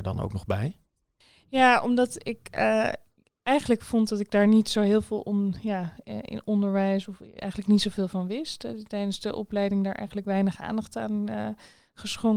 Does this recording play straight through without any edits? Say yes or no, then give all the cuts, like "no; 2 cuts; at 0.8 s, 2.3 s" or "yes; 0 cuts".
yes; 0 cuts